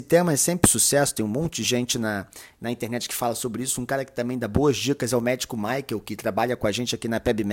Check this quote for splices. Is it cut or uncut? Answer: uncut